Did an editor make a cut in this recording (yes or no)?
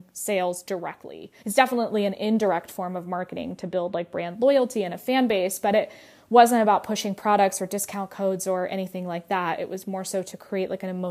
yes